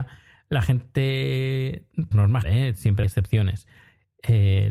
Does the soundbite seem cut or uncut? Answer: cut